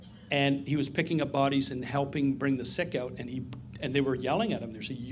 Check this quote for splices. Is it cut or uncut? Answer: uncut